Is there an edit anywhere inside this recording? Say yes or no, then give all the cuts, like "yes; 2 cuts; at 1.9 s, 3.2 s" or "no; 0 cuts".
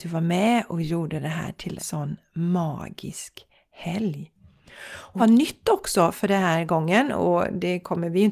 yes; 2 cuts; at 1.8 s, 5.2 s